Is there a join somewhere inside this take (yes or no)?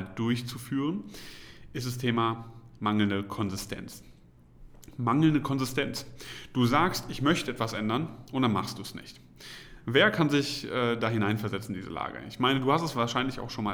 no